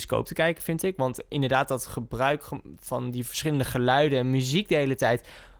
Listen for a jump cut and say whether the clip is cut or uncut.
uncut